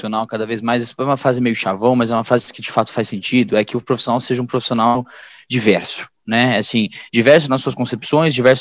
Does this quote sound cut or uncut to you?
uncut